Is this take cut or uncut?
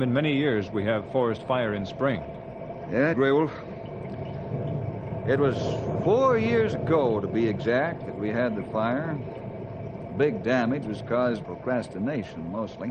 cut